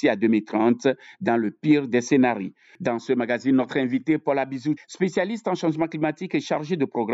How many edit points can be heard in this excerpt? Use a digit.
1